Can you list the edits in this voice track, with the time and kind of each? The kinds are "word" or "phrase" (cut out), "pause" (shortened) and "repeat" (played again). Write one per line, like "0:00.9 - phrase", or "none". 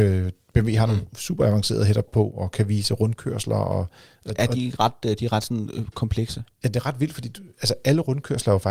0:02.1 - phrase
0:04.8 - word